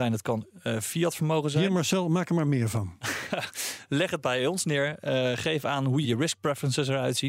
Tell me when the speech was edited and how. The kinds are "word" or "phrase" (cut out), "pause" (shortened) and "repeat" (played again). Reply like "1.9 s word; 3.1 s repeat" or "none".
6.0 s word